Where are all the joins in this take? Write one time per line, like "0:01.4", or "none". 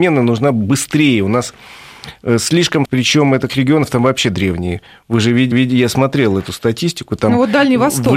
0:02.8
0:03.5
0:05.5